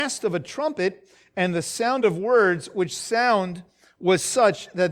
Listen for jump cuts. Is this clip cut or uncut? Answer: uncut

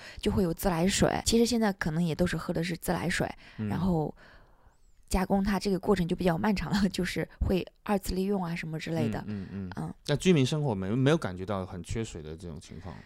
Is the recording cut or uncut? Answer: cut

